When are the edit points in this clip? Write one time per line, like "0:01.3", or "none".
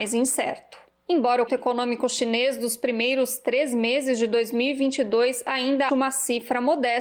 0:01.5
0:05.9